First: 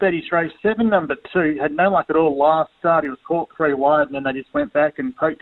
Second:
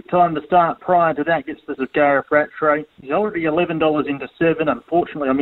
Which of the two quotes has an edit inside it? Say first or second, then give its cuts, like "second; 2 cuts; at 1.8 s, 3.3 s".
second; 2 cuts; at 1.8 s, 2.9 s